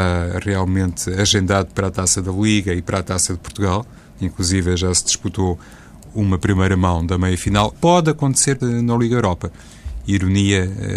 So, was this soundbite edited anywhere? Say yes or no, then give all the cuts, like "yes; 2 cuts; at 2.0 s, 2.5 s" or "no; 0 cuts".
yes; 2 cuts; at 7.7 s, 8.6 s